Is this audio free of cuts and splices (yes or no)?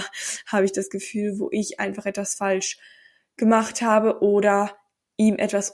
yes